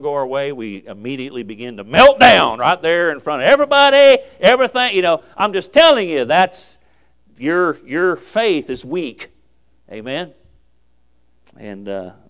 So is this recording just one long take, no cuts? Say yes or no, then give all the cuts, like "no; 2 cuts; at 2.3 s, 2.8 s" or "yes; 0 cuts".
yes; 0 cuts